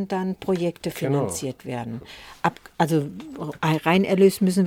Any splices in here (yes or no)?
no